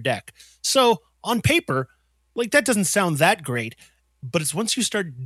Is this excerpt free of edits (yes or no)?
yes